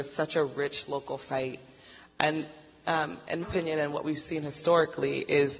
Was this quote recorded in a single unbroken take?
no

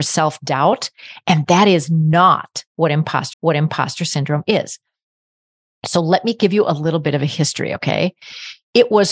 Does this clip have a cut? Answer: yes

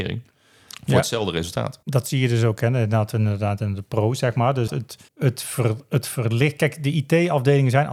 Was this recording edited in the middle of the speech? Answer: yes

